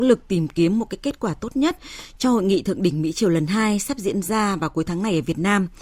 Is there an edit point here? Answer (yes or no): no